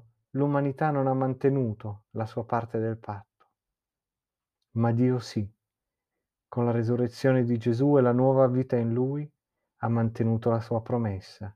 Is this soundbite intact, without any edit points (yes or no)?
yes